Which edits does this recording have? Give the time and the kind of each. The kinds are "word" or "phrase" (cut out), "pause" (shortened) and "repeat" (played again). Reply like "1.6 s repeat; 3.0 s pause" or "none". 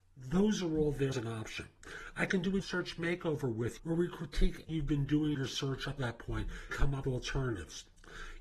1.1 s word; 2.6 s word; 3.8 s word; 4.7 s word; 5.3 s word; 6.0 s word; 6.7 s word; 7.0 s word